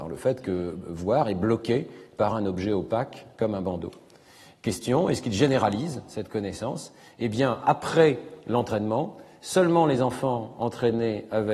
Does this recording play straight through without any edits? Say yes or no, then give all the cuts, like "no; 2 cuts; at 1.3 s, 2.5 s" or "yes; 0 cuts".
yes; 0 cuts